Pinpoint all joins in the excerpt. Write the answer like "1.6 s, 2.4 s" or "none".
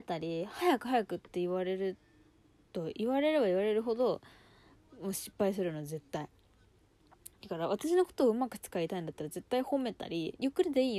none

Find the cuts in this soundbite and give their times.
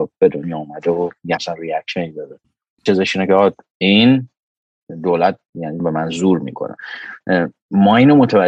1.4 s, 2.9 s, 5.8 s

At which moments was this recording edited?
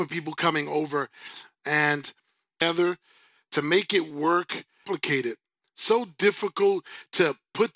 none

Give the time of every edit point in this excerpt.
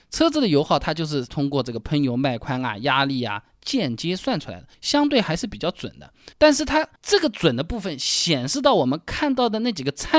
1.3 s, 4.7 s, 6.3 s, 7.0 s

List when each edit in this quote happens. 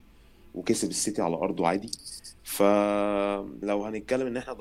3.6 s

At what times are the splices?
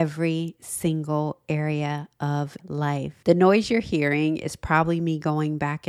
2.6 s

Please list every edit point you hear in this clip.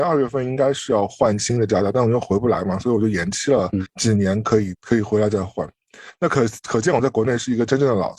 4.7 s

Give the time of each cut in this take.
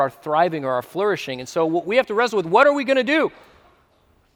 none

